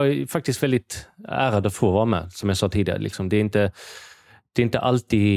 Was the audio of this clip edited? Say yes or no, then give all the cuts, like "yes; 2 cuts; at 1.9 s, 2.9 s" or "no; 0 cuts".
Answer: no; 0 cuts